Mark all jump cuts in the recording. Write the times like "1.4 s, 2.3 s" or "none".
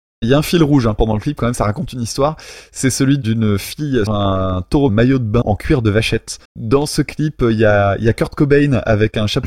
4.1 s, 4.9 s, 5.4 s, 6.5 s